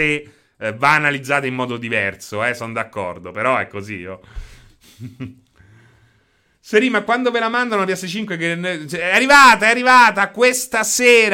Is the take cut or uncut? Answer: uncut